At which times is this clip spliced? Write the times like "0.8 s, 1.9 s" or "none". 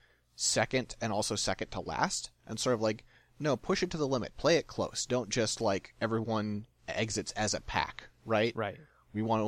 6.8 s